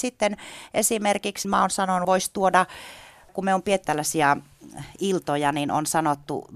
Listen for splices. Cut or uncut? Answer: cut